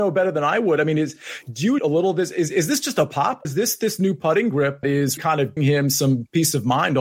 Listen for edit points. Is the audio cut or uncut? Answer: cut